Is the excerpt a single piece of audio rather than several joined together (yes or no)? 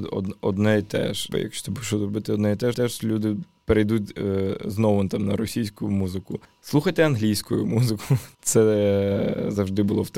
no